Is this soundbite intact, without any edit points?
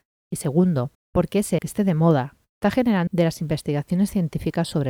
no; 3 cuts; at 0.9 s, 1.6 s, 3.1 s

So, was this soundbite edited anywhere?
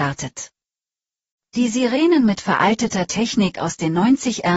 no; 0 cuts

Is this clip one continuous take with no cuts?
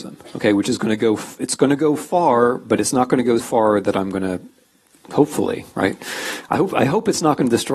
no; 1 cut; at 3.4 s

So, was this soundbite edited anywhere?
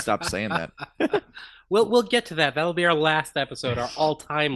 no; 0 cuts

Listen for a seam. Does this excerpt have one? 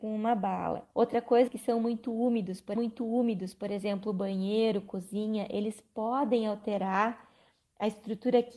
yes; 3 cuts; at 0.9 s, 1.5 s, 2.8 s

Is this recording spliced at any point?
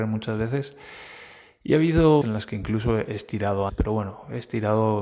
yes; 2 cuts; at 2.2 s, 3.7 s

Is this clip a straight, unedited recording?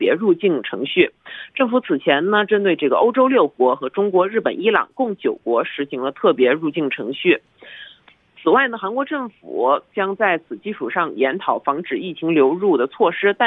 yes; 0 cuts

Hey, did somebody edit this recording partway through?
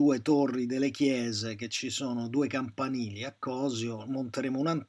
no; 0 cuts

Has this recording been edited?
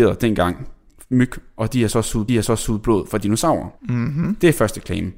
yes; 2 cuts; at 2.3 s, 3.8 s

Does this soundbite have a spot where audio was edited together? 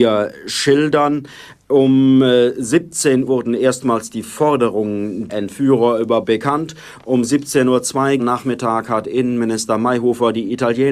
yes; 4 cuts; at 3.3 s, 5.3 s, 6.2 s, 8.2 s

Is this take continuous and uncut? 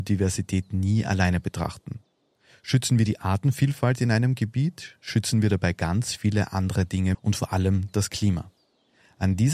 no; 1 cut; at 7.1 s

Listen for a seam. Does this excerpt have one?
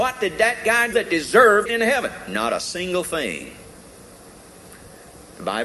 yes; 2 cuts; at 0.9 s, 1.7 s

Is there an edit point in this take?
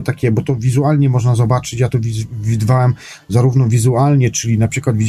no; 0 cuts

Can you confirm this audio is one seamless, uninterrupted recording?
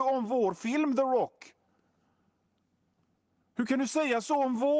yes; 0 cuts

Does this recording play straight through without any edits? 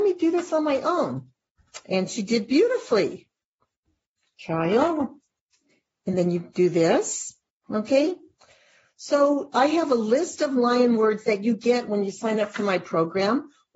yes; 0 cuts

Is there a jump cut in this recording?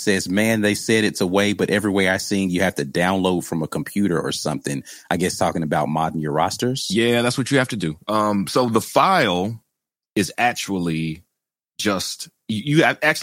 no; 0 cuts

